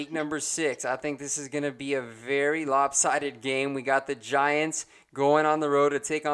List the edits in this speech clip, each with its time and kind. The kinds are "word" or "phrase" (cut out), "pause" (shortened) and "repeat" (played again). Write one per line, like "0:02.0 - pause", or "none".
none